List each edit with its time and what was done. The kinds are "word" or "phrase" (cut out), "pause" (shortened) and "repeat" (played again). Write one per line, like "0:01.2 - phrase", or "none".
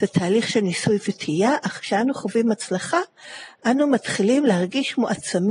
none